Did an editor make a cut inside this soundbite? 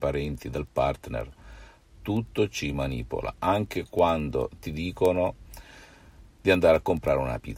no; 0 cuts

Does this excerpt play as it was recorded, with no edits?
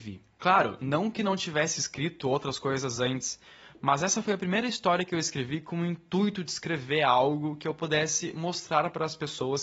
yes; 0 cuts

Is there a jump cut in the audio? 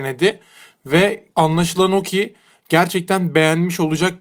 yes; 1 cut; at 1.3 s

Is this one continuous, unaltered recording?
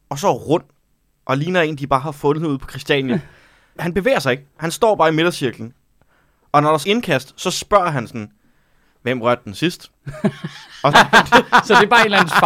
no; 3 cuts; at 3.8 s, 6.8 s, 10.9 s

